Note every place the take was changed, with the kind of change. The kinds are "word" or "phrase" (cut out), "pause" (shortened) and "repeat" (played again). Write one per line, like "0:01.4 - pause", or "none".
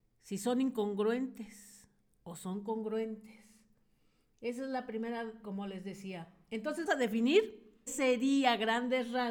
0:05.4 - word
0:06.9 - word
0:07.9 - word

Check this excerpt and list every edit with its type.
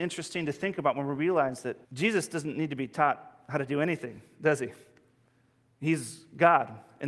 0:01.8 - pause

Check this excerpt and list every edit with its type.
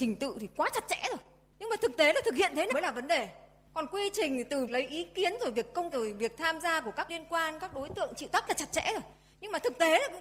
0:02.7 - word
0:04.7 - word
0:05.9 - word
0:07.1 - word
0:08.5 - phrase

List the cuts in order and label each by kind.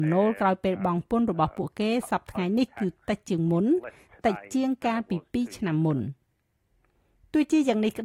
none

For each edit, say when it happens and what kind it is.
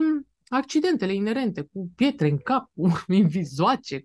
none

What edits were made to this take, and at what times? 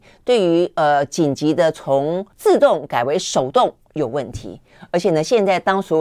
0:02.3 - pause

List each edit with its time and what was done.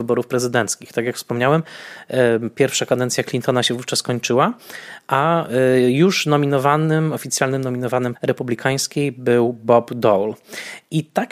0:08.1 - word

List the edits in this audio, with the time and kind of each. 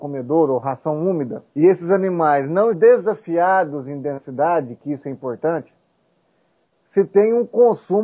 0:01.5 - pause
0:02.7 - word

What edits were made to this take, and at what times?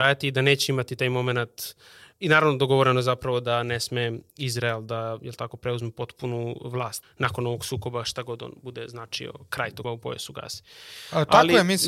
0:07.0 - word
0:09.8 - word

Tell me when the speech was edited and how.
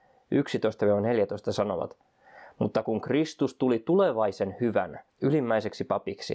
0:05.1 - pause

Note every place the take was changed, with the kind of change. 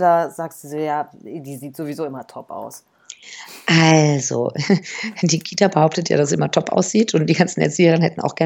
none

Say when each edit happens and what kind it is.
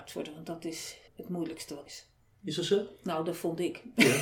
0:01.1 - pause
0:01.9 - word

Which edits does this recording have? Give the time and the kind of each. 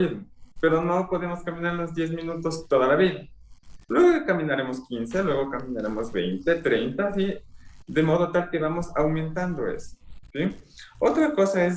none

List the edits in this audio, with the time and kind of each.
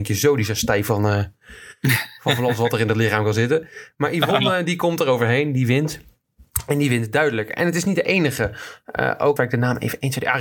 0:09.4 - phrase

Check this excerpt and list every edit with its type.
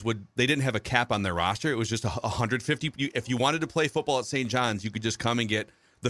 none

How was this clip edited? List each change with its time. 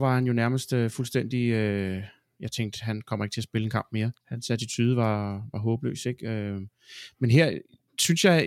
0:04.2 - pause

